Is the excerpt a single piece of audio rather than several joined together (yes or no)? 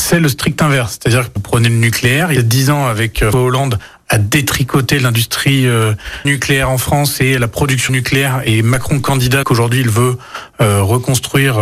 no